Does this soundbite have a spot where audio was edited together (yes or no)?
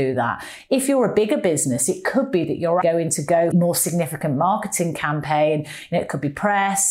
yes